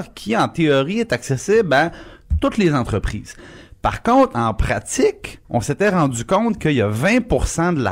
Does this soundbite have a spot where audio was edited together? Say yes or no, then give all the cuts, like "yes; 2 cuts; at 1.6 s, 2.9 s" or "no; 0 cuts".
yes; 1 cut; at 5.4 s